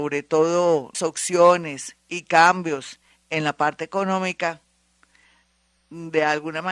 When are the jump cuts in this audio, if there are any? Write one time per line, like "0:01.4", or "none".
0:00.9